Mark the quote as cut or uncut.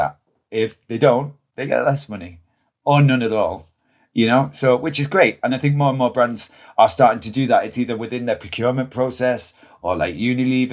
uncut